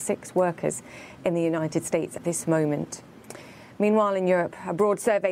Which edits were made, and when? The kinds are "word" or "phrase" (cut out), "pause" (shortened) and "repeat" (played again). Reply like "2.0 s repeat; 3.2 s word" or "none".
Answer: 2.2 s word